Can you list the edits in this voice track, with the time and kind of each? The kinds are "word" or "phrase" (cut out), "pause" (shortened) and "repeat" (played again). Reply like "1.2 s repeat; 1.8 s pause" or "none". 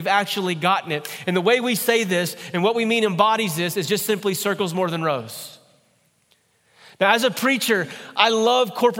none